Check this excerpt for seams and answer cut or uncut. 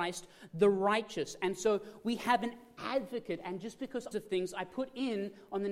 cut